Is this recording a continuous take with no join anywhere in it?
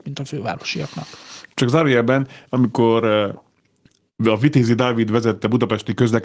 yes; 0 cuts

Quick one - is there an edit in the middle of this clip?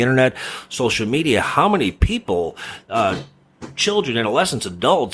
no; 0 cuts

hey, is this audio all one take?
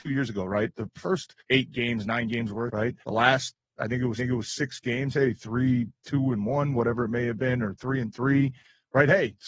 no; 4 cuts; at 1.4 s, 2.7 s, 3.0 s, 4.2 s

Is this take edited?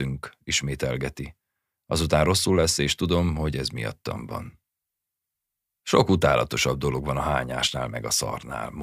no; 0 cuts

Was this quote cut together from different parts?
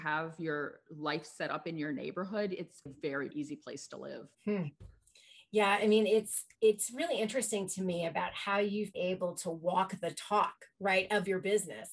yes; 5 cuts; at 2.9 s, 3.3 s, 4.3 s, 6.5 s, 8.9 s

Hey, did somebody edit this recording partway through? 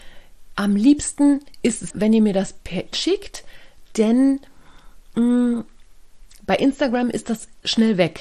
yes; 2 cuts; at 1.9 s, 2.9 s

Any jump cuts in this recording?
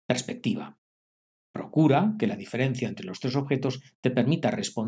no; 0 cuts

